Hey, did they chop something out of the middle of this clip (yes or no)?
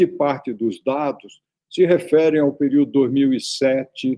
no